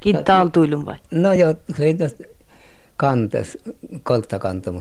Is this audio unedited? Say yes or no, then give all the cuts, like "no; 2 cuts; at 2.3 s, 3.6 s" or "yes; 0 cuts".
yes; 0 cuts